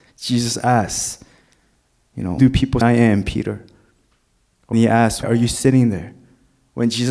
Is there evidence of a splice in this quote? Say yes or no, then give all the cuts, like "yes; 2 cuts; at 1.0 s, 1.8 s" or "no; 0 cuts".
yes; 4 cuts; at 2.4 s, 2.8 s, 4.7 s, 5.2 s